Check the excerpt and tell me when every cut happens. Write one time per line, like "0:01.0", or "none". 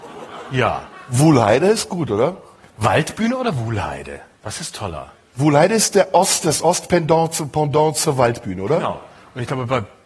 none